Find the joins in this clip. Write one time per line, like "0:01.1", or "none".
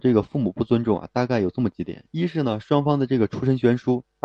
0:02.1